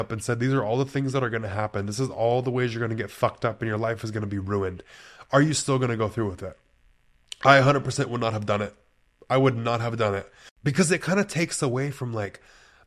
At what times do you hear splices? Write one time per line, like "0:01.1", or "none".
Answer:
none